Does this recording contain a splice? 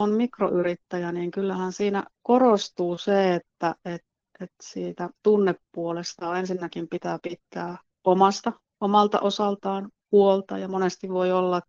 no; 0 cuts

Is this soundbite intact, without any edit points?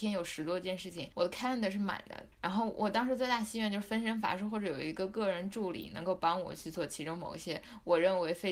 no; 2 cuts; at 1.1 s, 2.3 s

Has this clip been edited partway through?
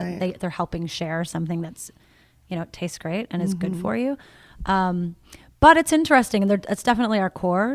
no; 0 cuts

